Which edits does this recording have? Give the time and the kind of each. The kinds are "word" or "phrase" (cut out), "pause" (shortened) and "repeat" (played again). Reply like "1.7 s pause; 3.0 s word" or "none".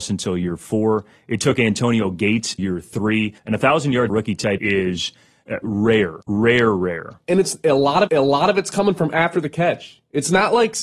2.6 s word; 3.4 s pause; 4.1 s phrase; 4.6 s word; 6.2 s pause; 8.1 s repeat